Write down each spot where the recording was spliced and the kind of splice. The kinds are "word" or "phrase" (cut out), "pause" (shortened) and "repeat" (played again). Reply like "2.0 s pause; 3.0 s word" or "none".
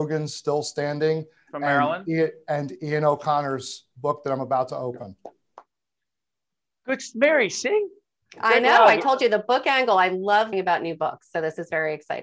10.5 s word